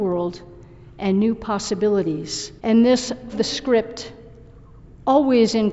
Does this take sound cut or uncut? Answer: cut